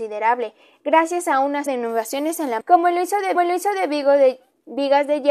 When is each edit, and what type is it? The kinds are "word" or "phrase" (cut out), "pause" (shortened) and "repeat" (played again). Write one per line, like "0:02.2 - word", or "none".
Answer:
0:01.7 - word
0:02.6 - word
0:03.4 - repeat

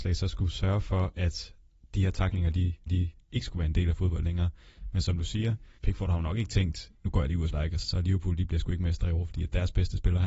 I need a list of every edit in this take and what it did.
0:02.9 - repeat
0:05.8 - pause
0:07.0 - pause
0:07.5 - phrase
0:07.8 - word

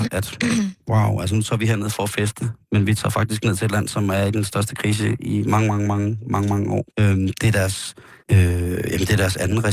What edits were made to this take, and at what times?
0:06.9 - pause
0:08.2 - pause

